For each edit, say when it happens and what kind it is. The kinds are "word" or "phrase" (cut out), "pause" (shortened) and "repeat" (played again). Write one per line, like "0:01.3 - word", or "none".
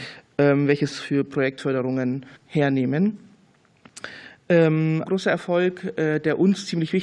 0:00.9 - phrase
0:02.4 - pause
0:05.0 - word